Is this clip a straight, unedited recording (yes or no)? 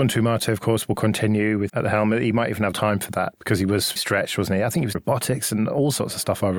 no